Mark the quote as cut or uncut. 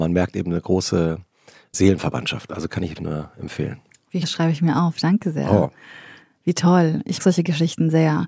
cut